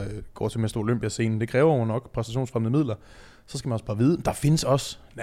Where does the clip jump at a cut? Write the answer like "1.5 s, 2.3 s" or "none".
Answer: none